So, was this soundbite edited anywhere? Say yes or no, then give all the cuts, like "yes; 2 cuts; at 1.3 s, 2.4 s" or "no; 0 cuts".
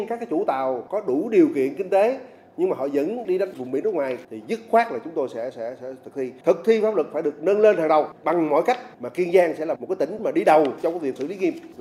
no; 0 cuts